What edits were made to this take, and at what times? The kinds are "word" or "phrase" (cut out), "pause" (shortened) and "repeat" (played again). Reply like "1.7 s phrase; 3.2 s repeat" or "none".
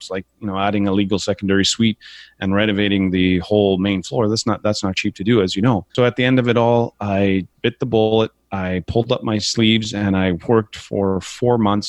5.9 s pause; 7.5 s word